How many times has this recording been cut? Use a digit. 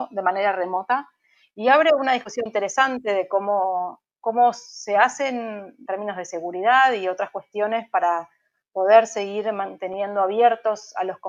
2